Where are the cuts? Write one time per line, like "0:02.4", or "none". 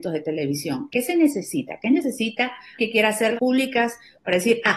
0:02.8
0:03.4